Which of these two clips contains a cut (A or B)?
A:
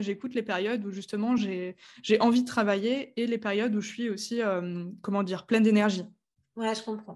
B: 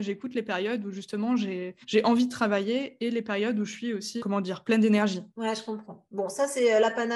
B